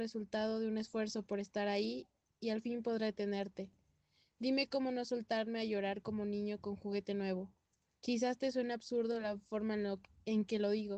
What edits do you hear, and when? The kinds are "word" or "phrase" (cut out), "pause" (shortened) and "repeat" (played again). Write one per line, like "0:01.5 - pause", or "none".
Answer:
none